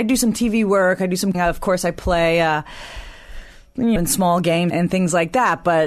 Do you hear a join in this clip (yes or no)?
yes